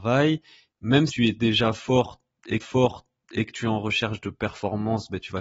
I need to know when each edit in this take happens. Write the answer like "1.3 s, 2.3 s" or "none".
1.1 s, 2.6 s